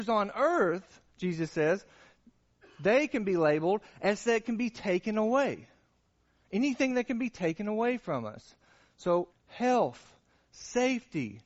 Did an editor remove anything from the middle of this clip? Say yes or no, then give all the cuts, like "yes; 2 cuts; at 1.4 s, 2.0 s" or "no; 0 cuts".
yes; 3 cuts; at 1.1 s, 4.2 s, 9.3 s